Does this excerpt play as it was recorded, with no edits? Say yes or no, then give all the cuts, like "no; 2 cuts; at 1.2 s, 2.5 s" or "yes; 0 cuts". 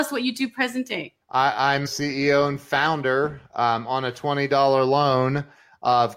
no; 2 cuts; at 1.2 s, 1.9 s